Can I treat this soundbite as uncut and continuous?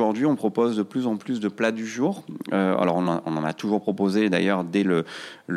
yes; 0 cuts

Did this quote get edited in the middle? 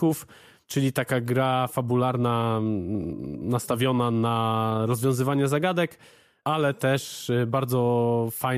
no; 0 cuts

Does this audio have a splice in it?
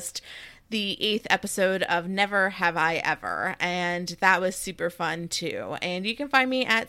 no; 0 cuts

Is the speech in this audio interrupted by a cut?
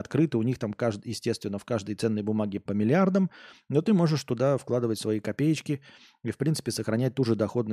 yes; 1 cut; at 2.7 s

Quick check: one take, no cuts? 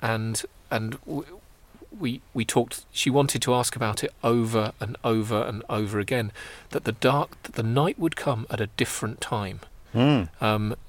no; 2 cuts; at 2.9 s, 9.9 s

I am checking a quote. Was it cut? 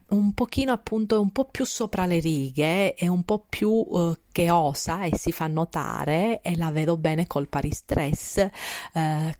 no; 0 cuts

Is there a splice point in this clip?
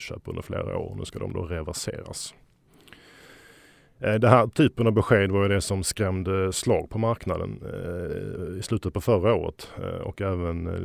no; 0 cuts

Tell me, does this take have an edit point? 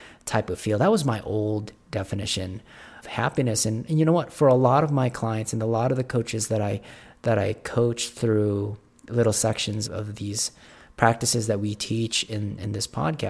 yes; 3 cuts; at 3.0 s, 3.9 s, 9.9 s

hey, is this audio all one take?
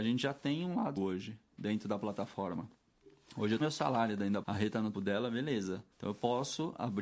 no; 5 cuts; at 1.0 s, 3.6 s, 4.4 s, 4.9 s, 5.9 s

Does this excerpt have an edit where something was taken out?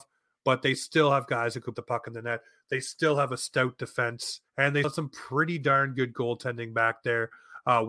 yes; 3 cuts; at 1.7 s, 4.5 s, 4.8 s

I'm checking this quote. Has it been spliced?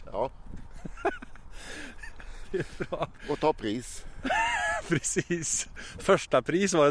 no; 0 cuts

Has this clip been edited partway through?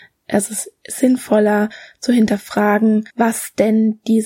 yes; 1 cut; at 3.1 s

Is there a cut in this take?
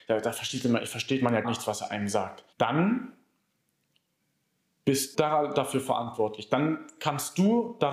yes; 3 cuts; at 1.4 s, 2.5 s, 5.1 s

